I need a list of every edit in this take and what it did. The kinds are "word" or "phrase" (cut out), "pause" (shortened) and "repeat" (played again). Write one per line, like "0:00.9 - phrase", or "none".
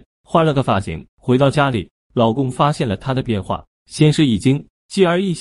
0:01.1 - pause